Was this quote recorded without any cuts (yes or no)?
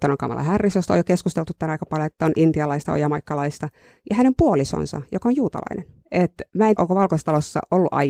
no